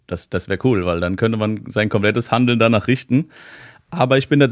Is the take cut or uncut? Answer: uncut